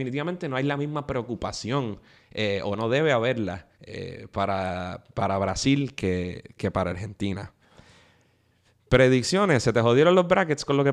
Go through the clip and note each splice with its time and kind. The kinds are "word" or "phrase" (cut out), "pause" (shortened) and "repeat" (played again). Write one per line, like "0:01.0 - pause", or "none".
0:03.7 - pause